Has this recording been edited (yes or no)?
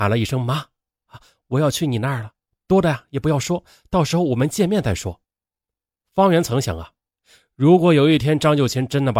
yes